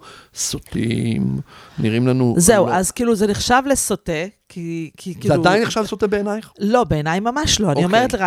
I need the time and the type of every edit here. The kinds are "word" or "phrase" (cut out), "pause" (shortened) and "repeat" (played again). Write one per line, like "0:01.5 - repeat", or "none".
none